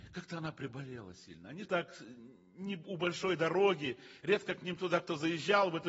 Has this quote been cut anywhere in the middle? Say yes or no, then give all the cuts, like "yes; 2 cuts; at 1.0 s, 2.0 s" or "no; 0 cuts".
yes; 1 cut; at 1.6 s